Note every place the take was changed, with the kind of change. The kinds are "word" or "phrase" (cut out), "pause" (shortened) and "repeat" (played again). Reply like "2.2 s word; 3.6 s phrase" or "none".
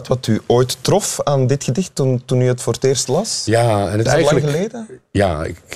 4.1 s word